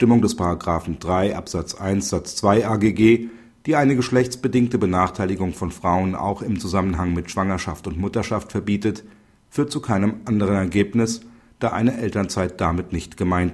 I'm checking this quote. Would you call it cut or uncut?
uncut